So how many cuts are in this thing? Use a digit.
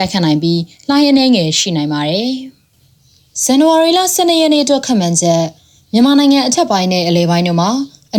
0